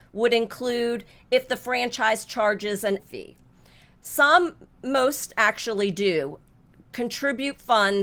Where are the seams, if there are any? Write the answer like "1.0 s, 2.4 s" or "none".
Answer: 3.0 s